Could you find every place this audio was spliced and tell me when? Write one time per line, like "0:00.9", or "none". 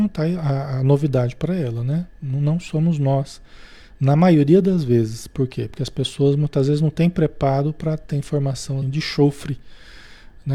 0:08.1
0:08.8